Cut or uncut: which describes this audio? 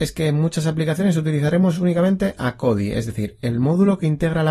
uncut